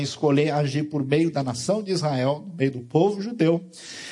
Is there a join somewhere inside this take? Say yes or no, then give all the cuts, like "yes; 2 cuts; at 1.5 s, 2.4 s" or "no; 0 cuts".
no; 0 cuts